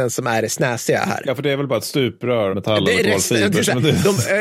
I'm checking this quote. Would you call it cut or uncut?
cut